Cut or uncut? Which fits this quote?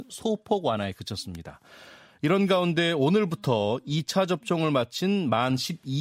uncut